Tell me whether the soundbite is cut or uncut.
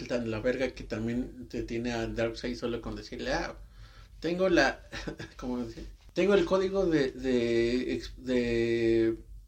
uncut